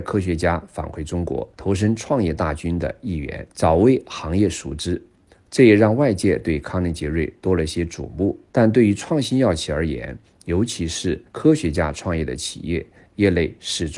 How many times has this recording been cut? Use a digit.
4